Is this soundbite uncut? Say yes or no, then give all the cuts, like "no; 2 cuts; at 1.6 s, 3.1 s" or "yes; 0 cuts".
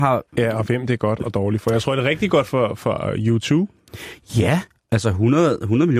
yes; 0 cuts